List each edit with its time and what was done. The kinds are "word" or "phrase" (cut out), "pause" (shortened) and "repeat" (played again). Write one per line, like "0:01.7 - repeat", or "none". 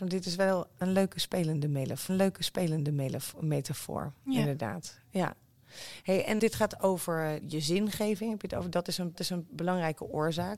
0:02.1 - repeat
0:06.4 - word
0:07.4 - word
0:09.1 - repeat